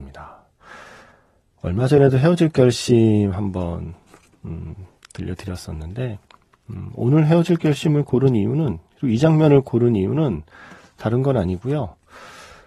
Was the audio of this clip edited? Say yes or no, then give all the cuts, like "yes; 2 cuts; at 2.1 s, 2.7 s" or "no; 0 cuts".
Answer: no; 0 cuts